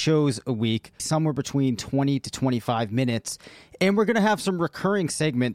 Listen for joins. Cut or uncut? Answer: cut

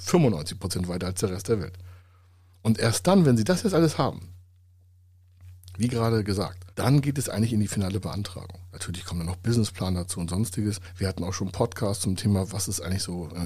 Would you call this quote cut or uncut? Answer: cut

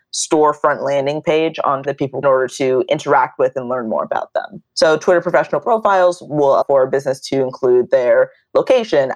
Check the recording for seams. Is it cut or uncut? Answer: cut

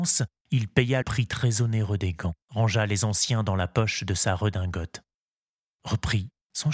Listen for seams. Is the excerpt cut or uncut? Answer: cut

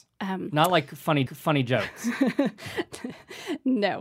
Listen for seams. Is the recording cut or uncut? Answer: cut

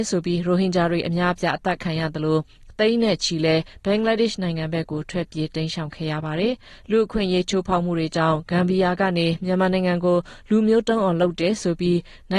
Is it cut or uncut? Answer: uncut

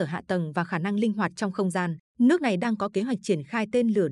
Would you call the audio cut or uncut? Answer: cut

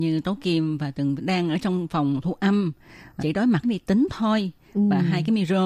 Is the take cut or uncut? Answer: cut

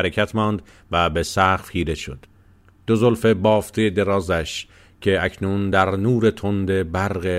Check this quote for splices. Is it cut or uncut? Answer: uncut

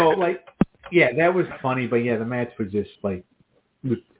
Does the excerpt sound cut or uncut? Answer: cut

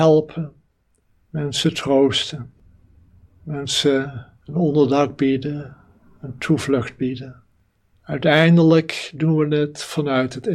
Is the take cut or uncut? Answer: cut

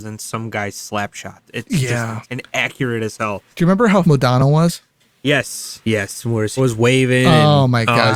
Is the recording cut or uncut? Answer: cut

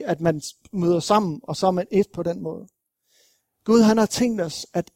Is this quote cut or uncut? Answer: uncut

